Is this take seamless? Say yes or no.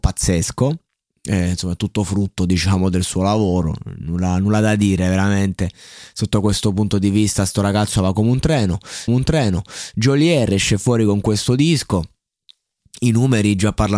no